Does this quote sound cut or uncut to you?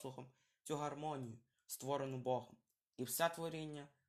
uncut